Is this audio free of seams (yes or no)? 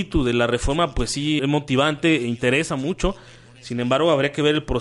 no